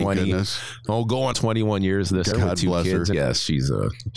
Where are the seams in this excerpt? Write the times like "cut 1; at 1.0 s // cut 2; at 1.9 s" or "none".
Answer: cut 1; at 1.3 s // cut 2; at 2.3 s // cut 3; at 3.1 s